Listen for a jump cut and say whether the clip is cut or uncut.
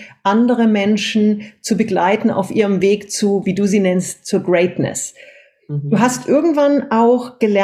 uncut